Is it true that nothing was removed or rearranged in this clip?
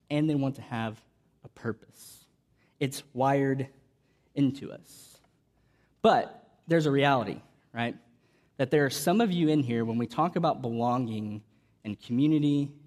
yes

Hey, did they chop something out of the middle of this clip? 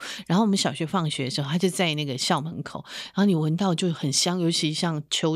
no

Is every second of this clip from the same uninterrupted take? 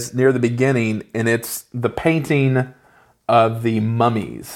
yes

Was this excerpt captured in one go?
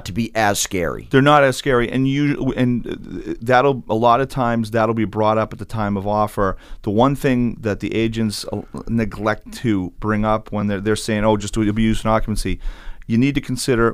yes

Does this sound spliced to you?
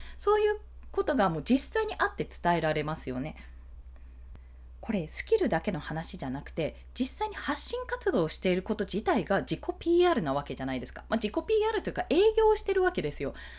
no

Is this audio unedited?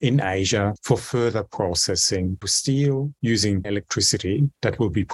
no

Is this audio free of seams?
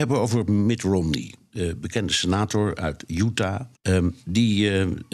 no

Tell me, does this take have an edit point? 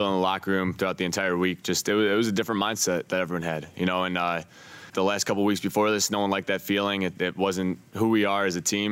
yes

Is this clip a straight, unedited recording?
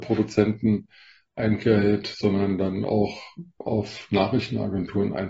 yes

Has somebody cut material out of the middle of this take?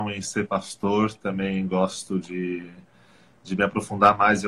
no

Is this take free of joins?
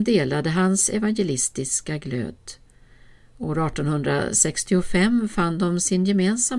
yes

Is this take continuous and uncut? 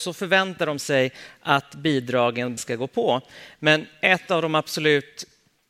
no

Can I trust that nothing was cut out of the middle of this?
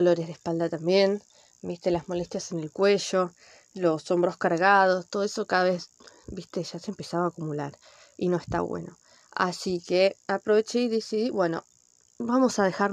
yes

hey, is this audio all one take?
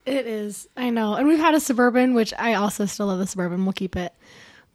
yes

